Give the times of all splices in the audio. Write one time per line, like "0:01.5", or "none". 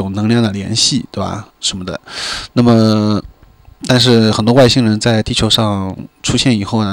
0:01.5